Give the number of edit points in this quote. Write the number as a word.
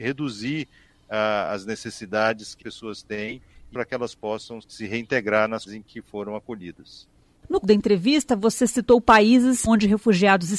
six